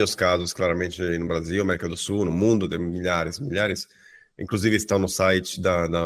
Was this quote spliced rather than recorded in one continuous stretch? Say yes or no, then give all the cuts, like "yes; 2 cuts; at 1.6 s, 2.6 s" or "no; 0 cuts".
no; 0 cuts